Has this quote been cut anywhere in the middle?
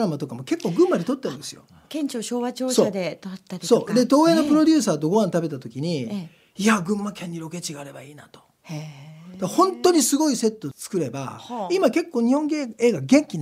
no; 0 cuts

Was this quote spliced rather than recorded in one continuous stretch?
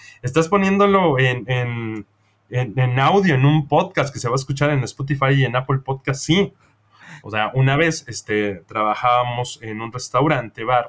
no; 0 cuts

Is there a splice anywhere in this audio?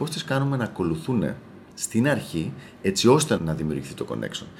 yes; 1 cut; at 1.7 s

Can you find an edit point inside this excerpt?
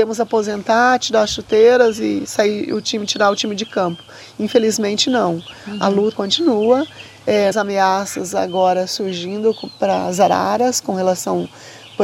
yes; 2 cuts; at 6.1 s, 7.5 s

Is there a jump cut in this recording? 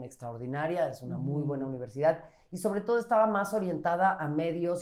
no; 0 cuts

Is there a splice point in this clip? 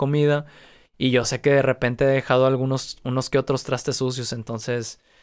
no; 0 cuts

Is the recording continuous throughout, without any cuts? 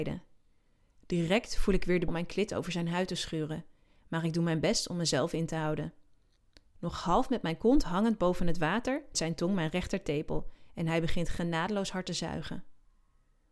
no; 2 cuts; at 2.1 s, 9.1 s

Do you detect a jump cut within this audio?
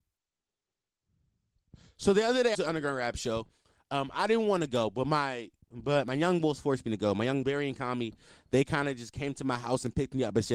yes; 2 cuts; at 2.5 s, 7.4 s

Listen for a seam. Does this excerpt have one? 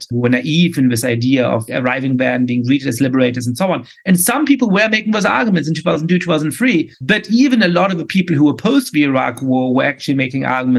yes; 1 cut; at 6.9 s

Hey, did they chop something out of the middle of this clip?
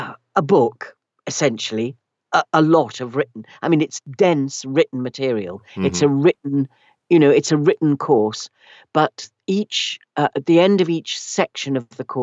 no; 0 cuts

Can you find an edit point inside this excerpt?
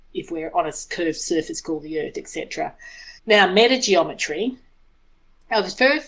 yes; 1 cut; at 3.2 s

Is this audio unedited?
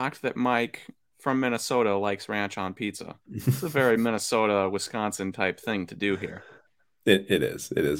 no; 1 cut; at 3.2 s

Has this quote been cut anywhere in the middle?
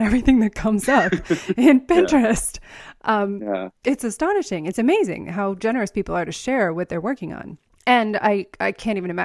yes; 2 cuts; at 3.8 s, 7.7 s

